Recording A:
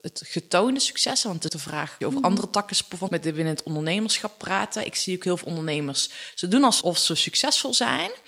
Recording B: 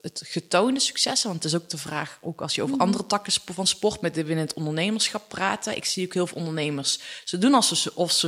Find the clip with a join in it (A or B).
A